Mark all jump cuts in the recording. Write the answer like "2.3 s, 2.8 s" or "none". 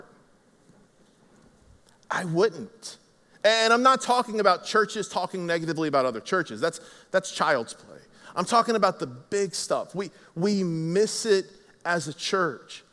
none